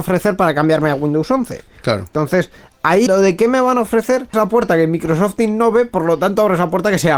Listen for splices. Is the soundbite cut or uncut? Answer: cut